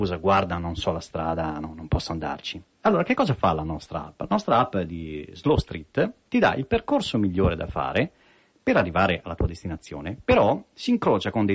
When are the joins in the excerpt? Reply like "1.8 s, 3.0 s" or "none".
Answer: none